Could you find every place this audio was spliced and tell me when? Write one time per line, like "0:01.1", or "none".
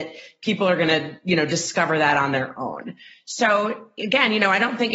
none